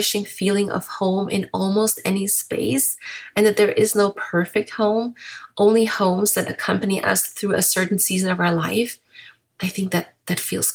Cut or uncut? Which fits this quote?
uncut